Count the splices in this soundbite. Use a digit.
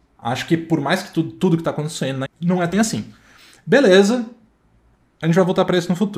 2